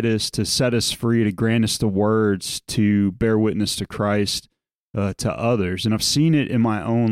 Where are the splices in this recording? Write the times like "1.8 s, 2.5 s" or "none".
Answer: none